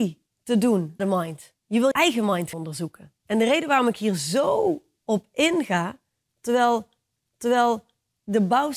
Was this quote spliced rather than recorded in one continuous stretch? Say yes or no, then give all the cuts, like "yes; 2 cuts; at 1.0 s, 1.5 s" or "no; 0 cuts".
yes; 6 cuts; at 1.0 s, 1.6 s, 1.9 s, 2.5 s, 3.2 s, 7.2 s